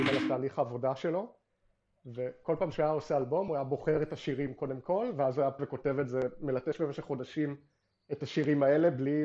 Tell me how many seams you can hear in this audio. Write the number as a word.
one